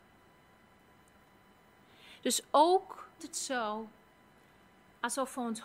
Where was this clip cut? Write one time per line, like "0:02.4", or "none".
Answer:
0:03.2